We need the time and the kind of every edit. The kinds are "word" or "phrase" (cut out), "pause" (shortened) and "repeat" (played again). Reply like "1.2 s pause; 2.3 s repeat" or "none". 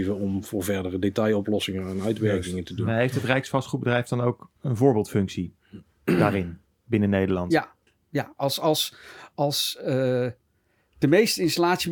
4.6 s pause